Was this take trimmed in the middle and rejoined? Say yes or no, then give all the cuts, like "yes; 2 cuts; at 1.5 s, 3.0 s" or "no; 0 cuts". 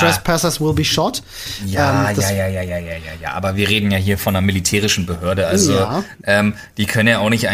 no; 0 cuts